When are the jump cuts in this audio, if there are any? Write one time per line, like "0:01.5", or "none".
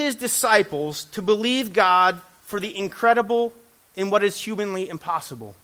0:03.8